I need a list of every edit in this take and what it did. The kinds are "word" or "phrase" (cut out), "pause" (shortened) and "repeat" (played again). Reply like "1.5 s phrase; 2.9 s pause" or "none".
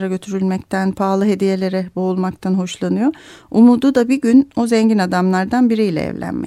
none